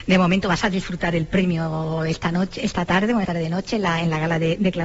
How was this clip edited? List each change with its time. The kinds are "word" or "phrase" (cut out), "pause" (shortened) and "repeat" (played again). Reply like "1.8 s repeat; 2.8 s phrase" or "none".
3.2 s word